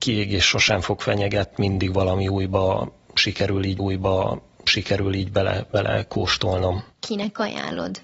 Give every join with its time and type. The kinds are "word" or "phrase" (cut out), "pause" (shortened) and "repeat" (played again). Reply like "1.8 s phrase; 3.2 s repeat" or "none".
1.5 s word; 3.8 s repeat